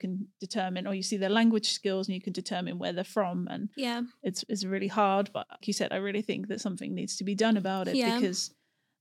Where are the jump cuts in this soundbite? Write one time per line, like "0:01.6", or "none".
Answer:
0:03.7
0:05.6